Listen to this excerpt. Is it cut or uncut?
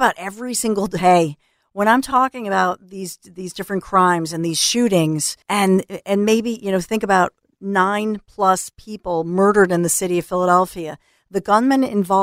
cut